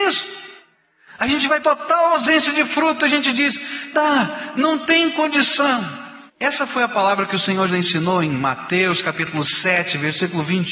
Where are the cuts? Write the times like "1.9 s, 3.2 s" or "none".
1.6 s, 3.9 s, 6.3 s, 7.7 s